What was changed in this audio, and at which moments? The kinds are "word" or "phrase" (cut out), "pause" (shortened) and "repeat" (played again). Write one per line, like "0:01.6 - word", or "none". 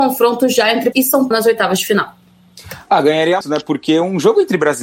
0:00.9 - word
0:01.3 - word
0:03.4 - word